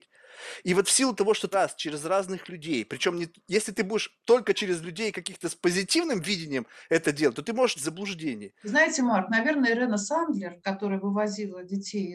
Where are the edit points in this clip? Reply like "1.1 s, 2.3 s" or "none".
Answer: 1.5 s, 7.8 s